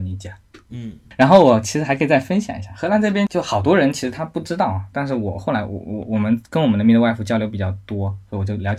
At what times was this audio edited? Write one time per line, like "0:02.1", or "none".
none